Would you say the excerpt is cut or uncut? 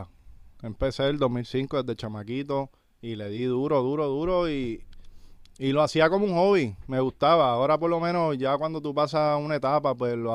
uncut